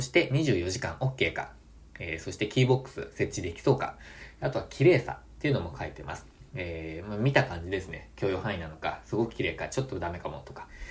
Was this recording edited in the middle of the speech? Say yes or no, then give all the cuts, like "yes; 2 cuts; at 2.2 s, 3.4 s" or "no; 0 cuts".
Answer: no; 0 cuts